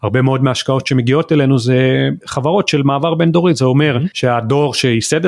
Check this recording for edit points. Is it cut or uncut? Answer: uncut